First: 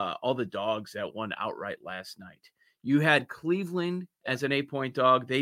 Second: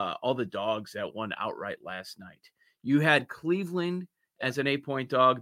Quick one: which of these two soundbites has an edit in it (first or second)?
first